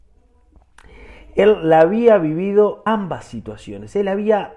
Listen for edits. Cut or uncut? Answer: cut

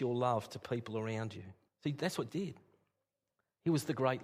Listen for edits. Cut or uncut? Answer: cut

